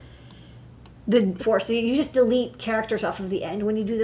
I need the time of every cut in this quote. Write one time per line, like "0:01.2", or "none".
0:01.4